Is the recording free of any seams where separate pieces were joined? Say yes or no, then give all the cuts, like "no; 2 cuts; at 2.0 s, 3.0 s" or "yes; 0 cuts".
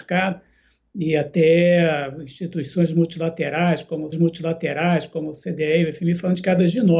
no; 1 cut; at 4.1 s